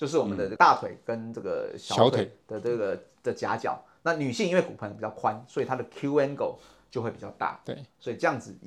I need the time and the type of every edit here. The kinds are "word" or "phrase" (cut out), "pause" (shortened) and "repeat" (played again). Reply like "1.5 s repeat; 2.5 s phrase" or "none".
none